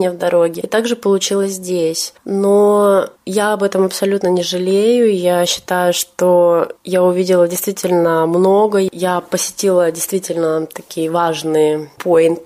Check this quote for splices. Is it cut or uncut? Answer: cut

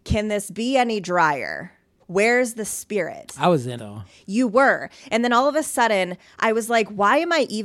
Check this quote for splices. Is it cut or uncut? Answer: cut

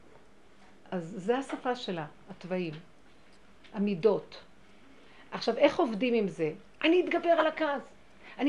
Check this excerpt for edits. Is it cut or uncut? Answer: uncut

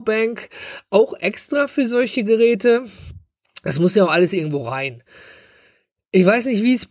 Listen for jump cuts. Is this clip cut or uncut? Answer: uncut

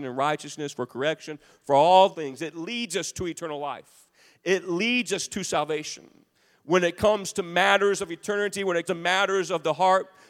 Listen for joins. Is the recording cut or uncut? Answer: cut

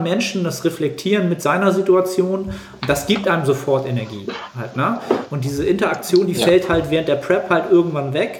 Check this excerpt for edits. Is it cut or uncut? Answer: uncut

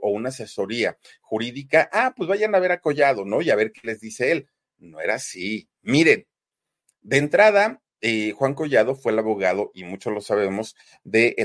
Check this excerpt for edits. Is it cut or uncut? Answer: uncut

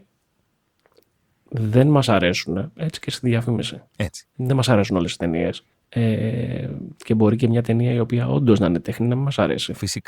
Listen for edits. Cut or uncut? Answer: cut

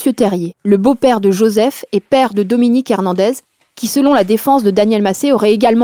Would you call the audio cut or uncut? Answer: uncut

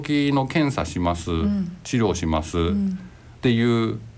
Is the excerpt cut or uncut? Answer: uncut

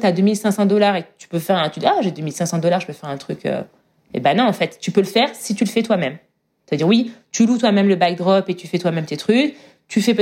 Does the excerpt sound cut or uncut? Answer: uncut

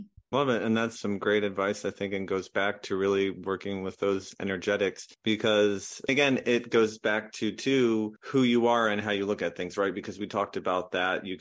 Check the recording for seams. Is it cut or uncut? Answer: uncut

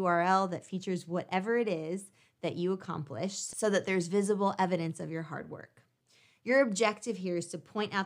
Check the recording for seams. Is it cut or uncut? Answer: uncut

